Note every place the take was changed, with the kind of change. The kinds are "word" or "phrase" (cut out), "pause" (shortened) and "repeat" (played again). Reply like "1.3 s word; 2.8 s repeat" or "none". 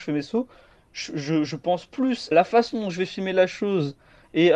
2.3 s word